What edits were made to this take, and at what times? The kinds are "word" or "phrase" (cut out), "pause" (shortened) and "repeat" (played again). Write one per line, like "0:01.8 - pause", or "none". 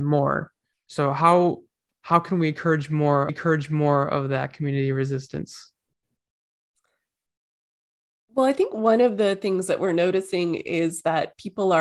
0:03.3 - repeat